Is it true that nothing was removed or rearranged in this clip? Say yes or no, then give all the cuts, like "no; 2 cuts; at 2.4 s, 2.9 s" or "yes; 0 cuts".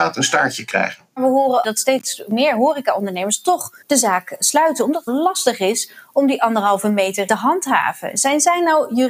no; 5 cuts; at 1.1 s, 1.6 s, 3.8 s, 5.1 s, 7.3 s